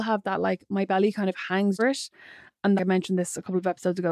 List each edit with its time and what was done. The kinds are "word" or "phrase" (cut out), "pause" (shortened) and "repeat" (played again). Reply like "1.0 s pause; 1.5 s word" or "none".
1.8 s phrase; 2.8 s phrase